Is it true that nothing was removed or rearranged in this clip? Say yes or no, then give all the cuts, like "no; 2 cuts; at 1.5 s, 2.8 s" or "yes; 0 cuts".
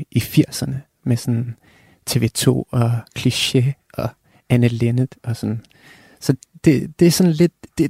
yes; 0 cuts